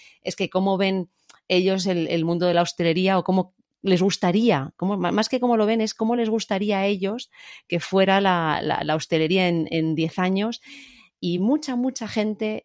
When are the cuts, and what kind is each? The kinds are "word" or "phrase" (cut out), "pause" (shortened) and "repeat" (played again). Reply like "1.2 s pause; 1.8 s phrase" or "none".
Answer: none